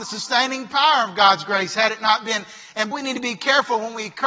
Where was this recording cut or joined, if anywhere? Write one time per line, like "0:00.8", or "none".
0:02.9